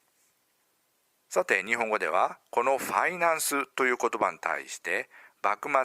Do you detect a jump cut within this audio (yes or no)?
no